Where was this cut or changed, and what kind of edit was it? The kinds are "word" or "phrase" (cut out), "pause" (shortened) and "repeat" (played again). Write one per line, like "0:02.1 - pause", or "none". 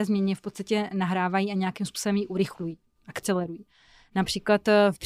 none